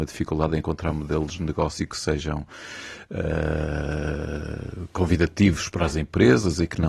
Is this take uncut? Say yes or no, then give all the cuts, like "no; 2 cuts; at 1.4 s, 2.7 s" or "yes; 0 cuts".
yes; 0 cuts